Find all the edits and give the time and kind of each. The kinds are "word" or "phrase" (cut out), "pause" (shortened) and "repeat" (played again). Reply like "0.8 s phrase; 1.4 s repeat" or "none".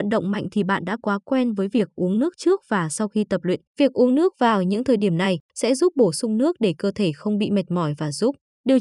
3.7 s pause; 5.5 s pause